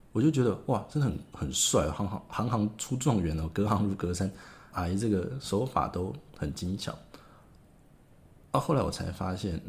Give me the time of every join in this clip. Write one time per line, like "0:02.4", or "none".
0:04.7